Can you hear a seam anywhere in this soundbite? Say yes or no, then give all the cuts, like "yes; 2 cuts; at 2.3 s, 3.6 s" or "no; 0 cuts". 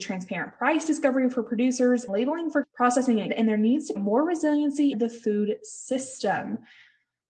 yes; 5 cuts; at 2.1 s, 2.6 s, 3.3 s, 4.0 s, 4.9 s